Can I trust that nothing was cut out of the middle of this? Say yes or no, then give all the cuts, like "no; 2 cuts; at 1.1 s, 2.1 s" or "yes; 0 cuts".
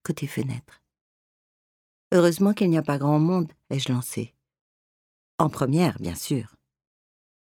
yes; 0 cuts